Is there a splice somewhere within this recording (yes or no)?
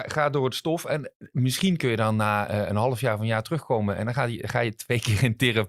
no